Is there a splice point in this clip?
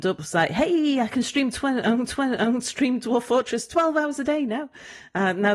yes; 1 cut; at 2.1 s

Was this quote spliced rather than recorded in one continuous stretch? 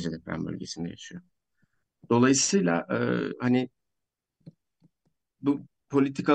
no; 0 cuts

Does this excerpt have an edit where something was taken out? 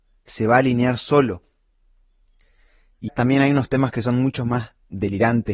yes; 1 cut; at 3.1 s

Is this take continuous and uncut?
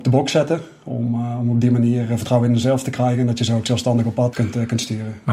no; 1 cut; at 4.3 s

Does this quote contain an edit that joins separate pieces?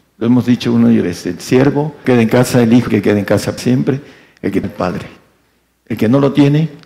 yes; 5 cuts; at 1.0 s, 2.0 s, 2.9 s, 3.6 s, 4.6 s

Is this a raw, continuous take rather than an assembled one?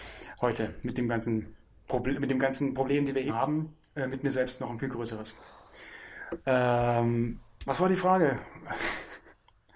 no; 1 cut; at 3.3 s

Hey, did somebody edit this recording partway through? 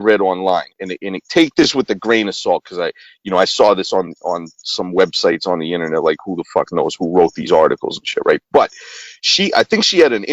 no; 0 cuts

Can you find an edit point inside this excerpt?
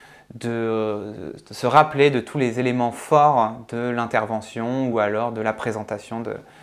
no; 0 cuts

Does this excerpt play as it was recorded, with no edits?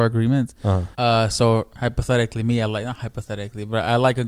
no; 1 cut; at 0.9 s

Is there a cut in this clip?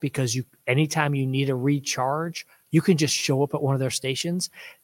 no; 0 cuts

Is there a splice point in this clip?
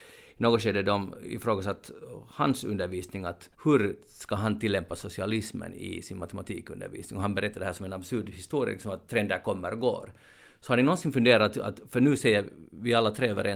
yes; 1 cut; at 3.5 s

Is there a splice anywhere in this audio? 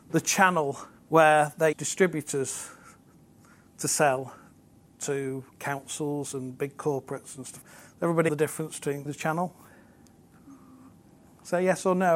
yes; 6 cuts; at 0.9 s, 1.7 s, 5.5 s, 7.6 s, 8.3 s, 9.1 s

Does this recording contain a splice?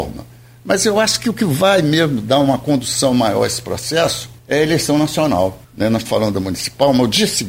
yes; 3 cuts; at 4.4 s, 5.6 s, 6.1 s

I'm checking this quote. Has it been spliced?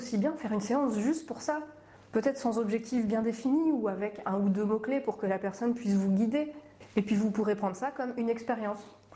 no; 0 cuts

